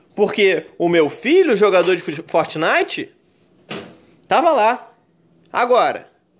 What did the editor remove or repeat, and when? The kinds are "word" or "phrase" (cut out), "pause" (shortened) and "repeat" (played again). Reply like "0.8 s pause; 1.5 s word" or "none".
none